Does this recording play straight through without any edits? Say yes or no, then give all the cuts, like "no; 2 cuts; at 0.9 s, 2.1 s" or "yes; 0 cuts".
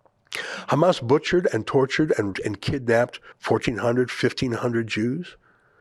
no; 2 cuts; at 2.3 s, 3.3 s